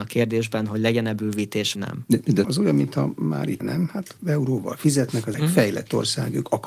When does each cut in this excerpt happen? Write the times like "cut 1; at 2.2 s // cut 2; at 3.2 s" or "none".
cut 1; at 1.7 s // cut 2; at 2.4 s // cut 3; at 3.6 s // cut 4; at 4.2 s // cut 5; at 5.3 s